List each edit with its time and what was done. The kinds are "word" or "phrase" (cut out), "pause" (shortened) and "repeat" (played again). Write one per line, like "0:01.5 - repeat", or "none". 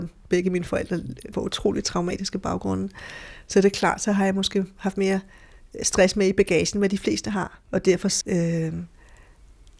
0:01.3 - word
0:07.6 - pause
0:08.2 - word